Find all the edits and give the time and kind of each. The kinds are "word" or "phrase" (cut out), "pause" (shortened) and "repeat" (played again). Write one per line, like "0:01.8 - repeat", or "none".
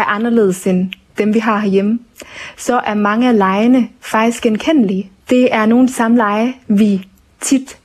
0:05.2 - pause